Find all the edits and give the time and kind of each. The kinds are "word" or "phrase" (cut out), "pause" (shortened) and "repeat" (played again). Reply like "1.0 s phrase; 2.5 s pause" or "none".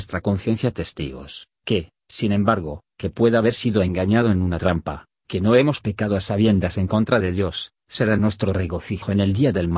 none